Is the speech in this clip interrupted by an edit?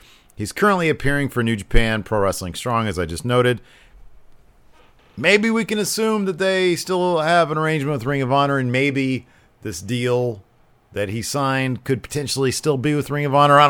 no; 0 cuts

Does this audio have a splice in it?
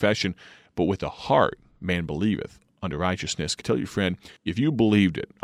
yes; 2 cuts; at 3.6 s, 4.4 s

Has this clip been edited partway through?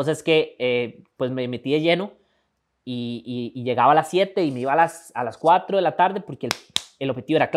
no; 0 cuts

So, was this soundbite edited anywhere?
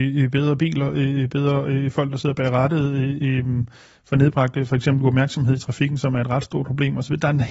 no; 0 cuts

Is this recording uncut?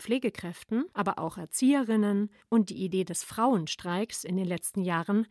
no; 1 cut; at 0.9 s

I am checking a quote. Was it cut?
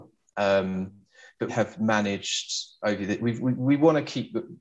yes; 1 cut; at 1.5 s

